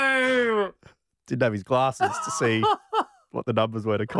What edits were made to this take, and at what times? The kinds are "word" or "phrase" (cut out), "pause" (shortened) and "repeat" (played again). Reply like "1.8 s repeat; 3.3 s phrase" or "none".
none

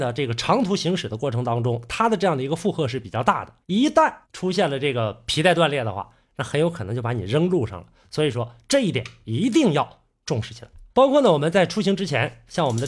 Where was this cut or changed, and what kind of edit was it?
3.6 s pause; 4.2 s pause; 10.9 s pause

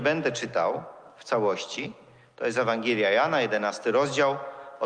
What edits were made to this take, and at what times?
none

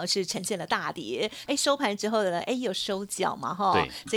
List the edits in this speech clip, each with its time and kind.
1.5 s phrase

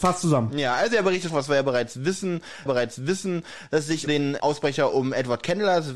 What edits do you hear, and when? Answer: 1.3 s phrase; 2.7 s repeat; 4.1 s word; 4.4 s word

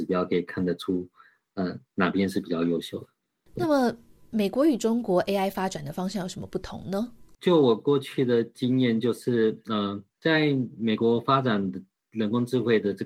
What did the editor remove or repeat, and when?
1.8 s pause

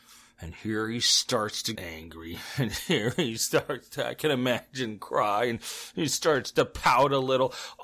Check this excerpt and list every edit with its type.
1.7 s word

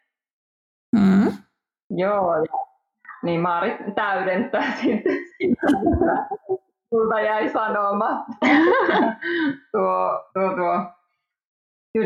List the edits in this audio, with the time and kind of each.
10.3 s pause

